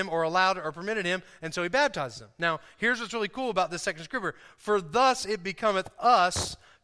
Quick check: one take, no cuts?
yes; 0 cuts

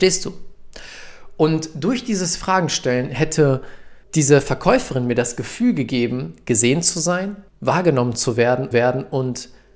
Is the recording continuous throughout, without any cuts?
no; 3 cuts; at 4.0 s, 7.5 s, 8.7 s

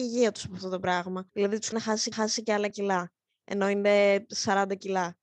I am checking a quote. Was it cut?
yes; 4 cuts; at 1.3 s, 1.7 s, 2.1 s, 2.7 s

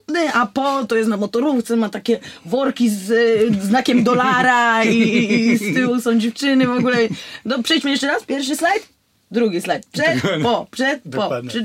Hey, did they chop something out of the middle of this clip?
no; 0 cuts

